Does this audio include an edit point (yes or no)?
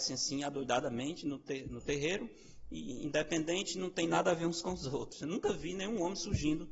no